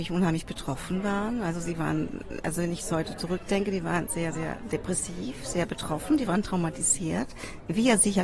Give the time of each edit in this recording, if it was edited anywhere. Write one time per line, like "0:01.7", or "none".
none